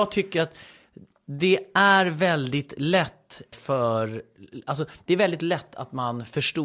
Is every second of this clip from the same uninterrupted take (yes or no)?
no